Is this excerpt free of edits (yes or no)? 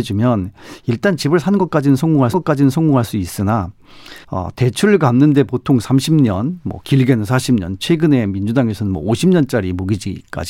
no